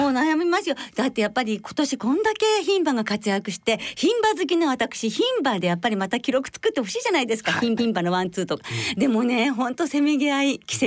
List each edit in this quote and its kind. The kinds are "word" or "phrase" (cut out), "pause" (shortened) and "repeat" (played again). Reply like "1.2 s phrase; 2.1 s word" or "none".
7.8 s repeat